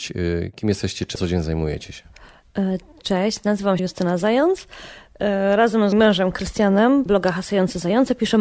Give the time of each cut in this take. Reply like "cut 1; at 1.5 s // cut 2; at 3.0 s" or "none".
cut 1; at 1.2 s // cut 2; at 3.8 s // cut 3; at 5.9 s // cut 4; at 7.1 s